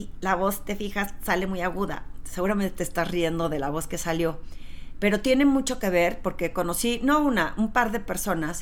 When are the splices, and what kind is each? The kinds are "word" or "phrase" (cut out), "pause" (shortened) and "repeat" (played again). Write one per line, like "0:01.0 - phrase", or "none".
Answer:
none